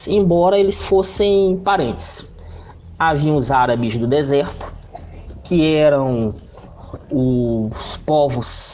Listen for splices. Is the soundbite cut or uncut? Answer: uncut